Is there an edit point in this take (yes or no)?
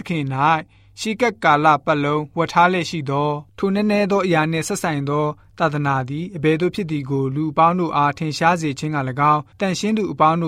yes